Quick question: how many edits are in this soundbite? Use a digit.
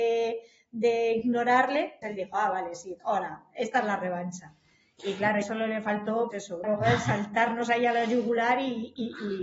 5